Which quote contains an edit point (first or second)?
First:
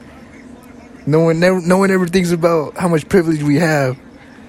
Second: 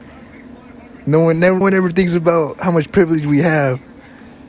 second